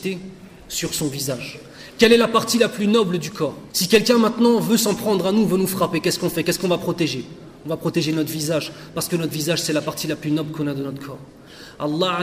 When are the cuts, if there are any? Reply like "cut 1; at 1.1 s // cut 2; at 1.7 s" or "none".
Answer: cut 1; at 3.7 s